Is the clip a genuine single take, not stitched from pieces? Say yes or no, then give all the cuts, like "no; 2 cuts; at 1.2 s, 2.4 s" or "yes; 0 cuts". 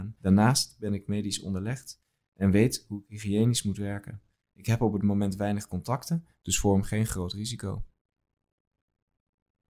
yes; 0 cuts